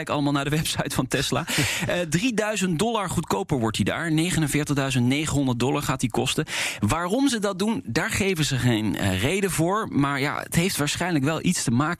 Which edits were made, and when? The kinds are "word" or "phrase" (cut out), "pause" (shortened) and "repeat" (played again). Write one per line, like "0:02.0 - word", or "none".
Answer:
none